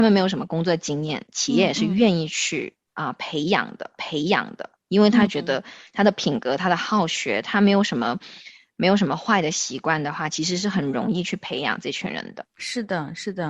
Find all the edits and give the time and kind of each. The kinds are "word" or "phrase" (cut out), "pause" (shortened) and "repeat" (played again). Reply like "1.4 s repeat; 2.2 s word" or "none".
4.0 s repeat; 12.5 s pause